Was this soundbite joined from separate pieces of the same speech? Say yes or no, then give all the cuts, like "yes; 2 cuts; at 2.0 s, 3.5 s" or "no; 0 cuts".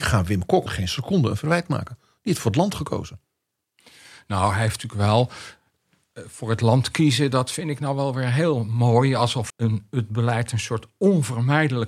yes; 1 cut; at 9.5 s